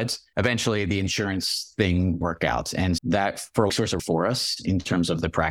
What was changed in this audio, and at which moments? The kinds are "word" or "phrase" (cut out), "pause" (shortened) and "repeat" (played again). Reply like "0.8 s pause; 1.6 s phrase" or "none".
2.2 s word; 3.0 s word; 3.7 s phrase; 4.0 s word

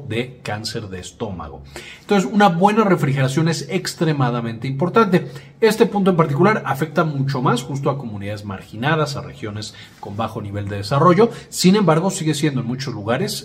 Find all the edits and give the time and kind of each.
none

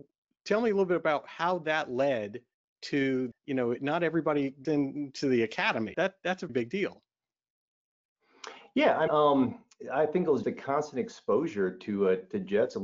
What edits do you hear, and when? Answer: 3.3 s word; 4.6 s word; 5.9 s word; 6.5 s word; 9.1 s word; 10.4 s word

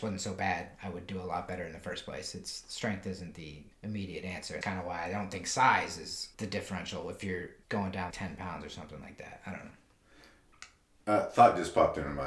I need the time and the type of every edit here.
3.7 s pause; 4.6 s word; 6.3 s pause; 7.6 s word; 8.1 s word

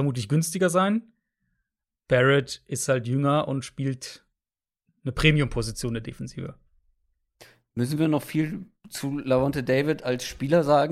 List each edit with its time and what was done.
none

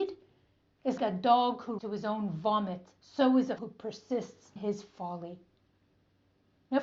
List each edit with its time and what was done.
1.0 s word; 1.8 s word; 3.0 s pause; 3.6 s word; 4.6 s word

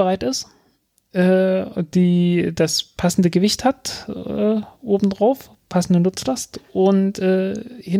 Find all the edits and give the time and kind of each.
none

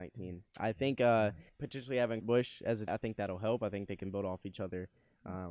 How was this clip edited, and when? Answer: 1.5 s word; 2.2 s word; 2.9 s word

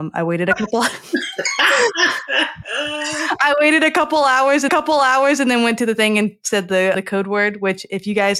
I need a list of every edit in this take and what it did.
4.7 s repeat; 6.9 s word

